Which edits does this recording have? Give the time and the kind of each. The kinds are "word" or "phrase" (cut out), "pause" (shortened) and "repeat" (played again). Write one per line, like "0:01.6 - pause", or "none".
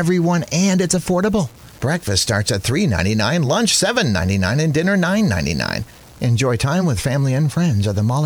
none